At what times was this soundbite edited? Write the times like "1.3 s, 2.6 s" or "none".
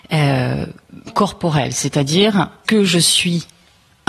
1.1 s, 2.6 s